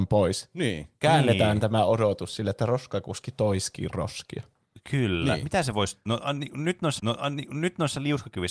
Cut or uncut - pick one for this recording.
cut